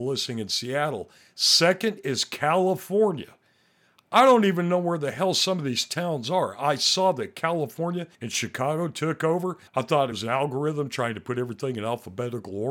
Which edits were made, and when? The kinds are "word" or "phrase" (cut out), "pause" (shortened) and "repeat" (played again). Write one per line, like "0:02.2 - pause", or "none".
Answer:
0:08.1 - pause
0:09.7 - pause
0:10.1 - phrase